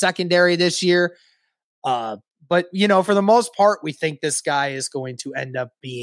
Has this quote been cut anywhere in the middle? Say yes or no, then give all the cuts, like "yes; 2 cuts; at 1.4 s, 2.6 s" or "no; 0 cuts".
no; 0 cuts